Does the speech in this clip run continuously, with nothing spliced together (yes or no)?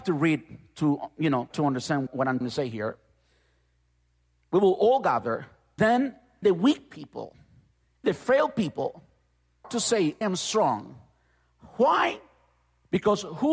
no